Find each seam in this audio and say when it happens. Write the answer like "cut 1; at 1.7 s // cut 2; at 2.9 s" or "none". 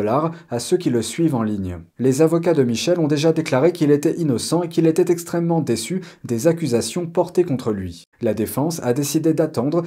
cut 1; at 1.9 s // cut 2; at 8.1 s